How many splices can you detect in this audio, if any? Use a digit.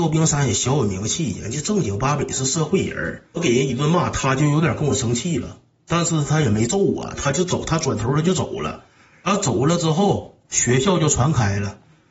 1